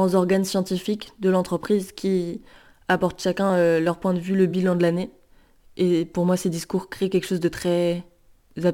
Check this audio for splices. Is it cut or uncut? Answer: uncut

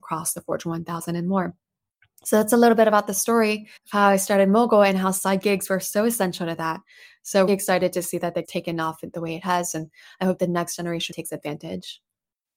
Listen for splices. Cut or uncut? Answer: cut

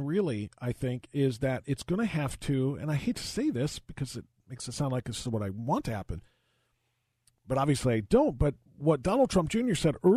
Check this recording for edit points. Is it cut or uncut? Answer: uncut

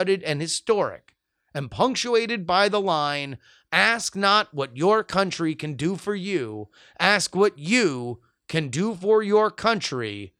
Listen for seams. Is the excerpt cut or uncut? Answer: uncut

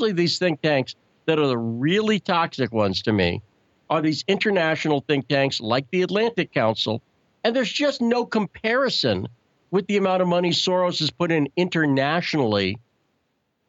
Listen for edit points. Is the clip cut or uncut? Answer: uncut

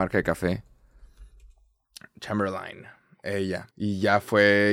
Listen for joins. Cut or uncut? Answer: cut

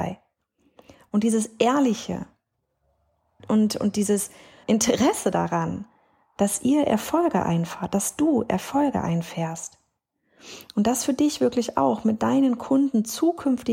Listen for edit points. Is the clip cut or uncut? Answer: cut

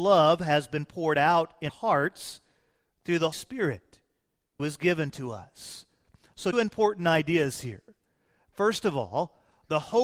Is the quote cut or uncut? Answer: cut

